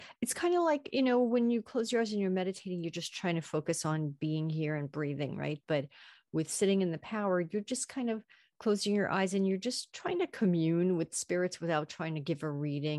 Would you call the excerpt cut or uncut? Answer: uncut